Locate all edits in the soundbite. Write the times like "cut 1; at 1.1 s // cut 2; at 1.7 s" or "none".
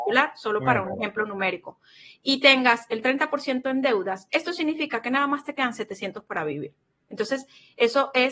none